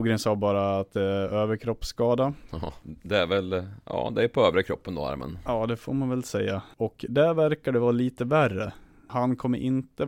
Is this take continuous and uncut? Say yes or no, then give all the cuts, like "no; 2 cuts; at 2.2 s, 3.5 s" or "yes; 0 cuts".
no; 1 cut; at 2.8 s